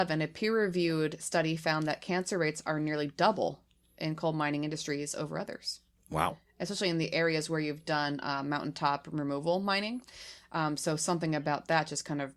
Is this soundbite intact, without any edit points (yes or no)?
yes